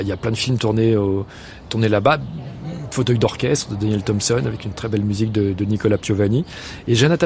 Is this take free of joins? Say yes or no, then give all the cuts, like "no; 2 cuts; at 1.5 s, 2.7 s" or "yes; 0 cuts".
yes; 0 cuts